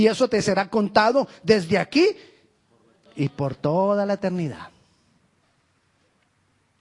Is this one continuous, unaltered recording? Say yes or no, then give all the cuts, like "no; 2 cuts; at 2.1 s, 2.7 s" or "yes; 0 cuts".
yes; 0 cuts